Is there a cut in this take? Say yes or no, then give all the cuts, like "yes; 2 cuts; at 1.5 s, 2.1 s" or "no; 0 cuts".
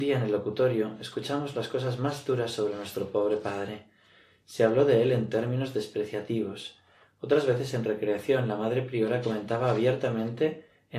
no; 0 cuts